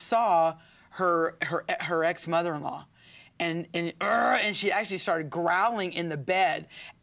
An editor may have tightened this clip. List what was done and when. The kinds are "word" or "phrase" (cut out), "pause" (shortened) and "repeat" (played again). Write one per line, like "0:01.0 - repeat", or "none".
none